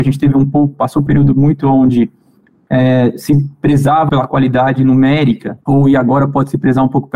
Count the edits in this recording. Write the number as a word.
three